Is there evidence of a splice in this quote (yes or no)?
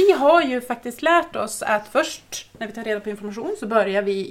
no